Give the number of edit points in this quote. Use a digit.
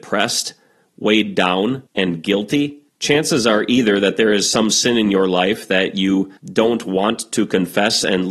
3